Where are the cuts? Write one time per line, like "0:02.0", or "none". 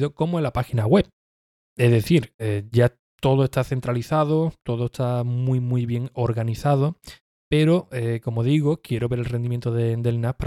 none